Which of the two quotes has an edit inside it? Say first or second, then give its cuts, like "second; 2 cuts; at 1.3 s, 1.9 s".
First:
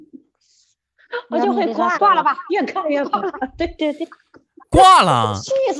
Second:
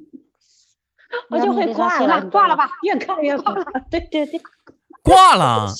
first; 1 cut; at 1.9 s